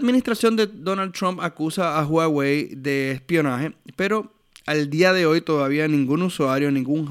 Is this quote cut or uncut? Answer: uncut